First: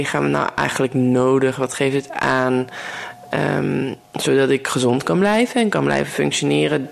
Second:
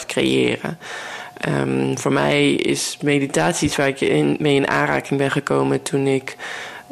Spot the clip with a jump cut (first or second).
first